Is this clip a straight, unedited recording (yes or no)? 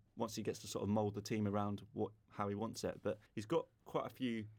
no